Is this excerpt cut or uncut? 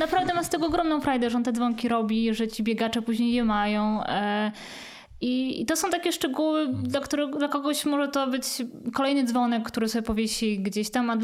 uncut